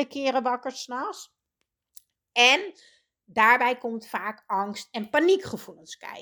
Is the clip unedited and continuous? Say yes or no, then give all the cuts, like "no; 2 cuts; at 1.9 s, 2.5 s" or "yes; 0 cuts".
yes; 0 cuts